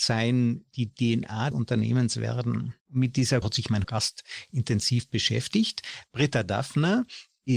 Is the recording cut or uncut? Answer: cut